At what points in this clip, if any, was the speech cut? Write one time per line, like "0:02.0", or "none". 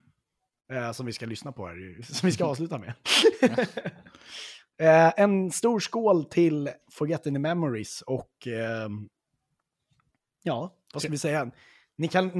none